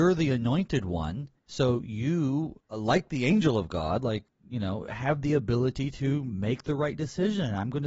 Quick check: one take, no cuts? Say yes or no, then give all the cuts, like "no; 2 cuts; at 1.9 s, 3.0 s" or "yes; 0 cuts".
no; 2 cuts; at 1.4 s, 2.6 s